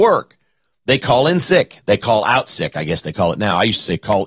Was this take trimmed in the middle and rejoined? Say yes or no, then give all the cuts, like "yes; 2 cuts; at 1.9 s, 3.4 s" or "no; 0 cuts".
no; 0 cuts